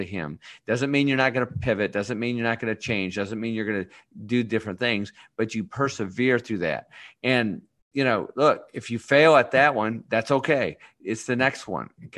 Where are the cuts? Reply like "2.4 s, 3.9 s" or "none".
none